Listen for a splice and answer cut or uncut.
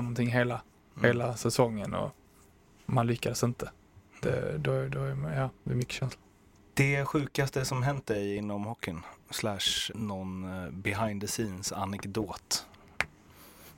cut